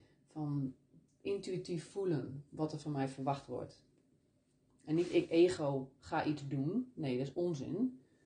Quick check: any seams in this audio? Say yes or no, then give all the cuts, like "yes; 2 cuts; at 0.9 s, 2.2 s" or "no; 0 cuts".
no; 0 cuts